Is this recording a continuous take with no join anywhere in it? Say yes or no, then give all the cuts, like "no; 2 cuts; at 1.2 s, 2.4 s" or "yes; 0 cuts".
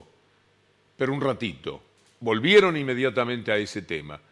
yes; 0 cuts